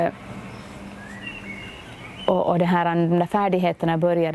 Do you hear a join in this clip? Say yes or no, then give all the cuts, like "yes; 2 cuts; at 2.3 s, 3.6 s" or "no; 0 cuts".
no; 0 cuts